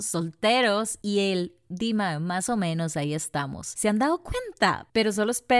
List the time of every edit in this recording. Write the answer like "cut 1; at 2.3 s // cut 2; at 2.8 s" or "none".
none